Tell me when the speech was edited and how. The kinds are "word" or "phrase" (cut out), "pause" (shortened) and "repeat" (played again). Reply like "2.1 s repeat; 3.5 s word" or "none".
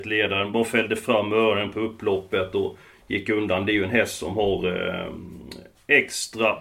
none